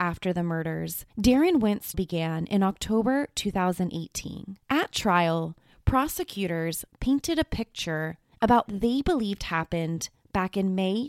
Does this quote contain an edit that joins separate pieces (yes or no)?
yes